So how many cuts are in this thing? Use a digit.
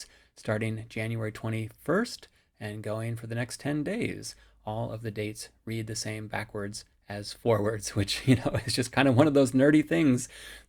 0